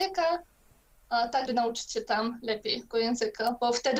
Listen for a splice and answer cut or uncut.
cut